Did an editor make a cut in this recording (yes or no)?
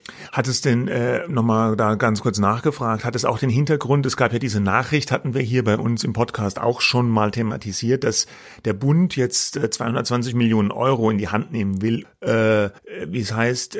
yes